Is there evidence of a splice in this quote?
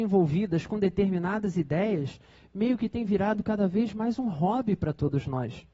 no; 0 cuts

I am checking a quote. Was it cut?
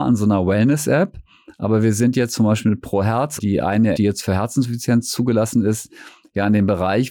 yes; 2 cuts; at 3.4 s, 3.9 s

